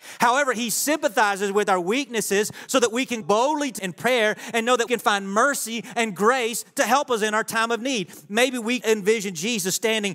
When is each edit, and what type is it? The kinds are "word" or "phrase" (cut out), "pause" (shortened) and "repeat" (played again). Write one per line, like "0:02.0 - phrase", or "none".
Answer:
0:03.2 - word
0:03.8 - word
0:04.9 - word
0:08.8 - word